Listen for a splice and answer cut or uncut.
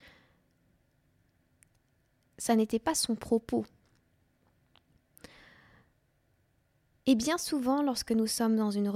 uncut